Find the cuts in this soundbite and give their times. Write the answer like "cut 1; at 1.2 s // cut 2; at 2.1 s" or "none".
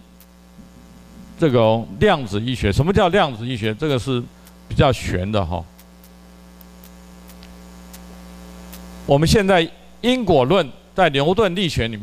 none